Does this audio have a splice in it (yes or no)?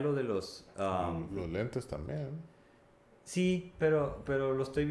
no